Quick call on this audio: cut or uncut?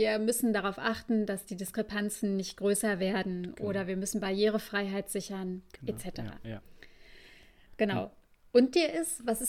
uncut